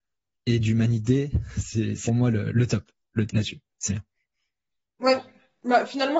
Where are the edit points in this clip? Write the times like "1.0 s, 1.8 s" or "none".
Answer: 2.1 s, 2.5 s, 3.3 s, 3.9 s